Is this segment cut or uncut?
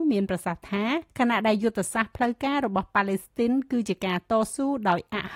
cut